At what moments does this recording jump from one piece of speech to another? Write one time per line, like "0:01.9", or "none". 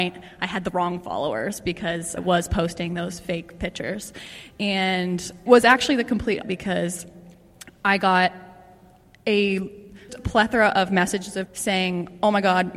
0:02.2
0:05.5
0:06.4
0:10.1
0:11.5